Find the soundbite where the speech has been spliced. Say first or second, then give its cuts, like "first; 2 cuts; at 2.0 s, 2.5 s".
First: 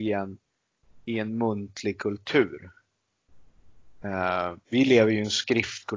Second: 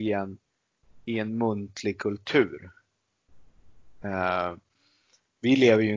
first; 1 cut; at 4.6 s